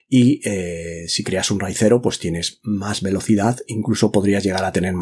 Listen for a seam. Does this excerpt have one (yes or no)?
no